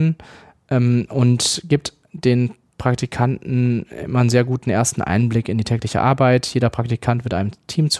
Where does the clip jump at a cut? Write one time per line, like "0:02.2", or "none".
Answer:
none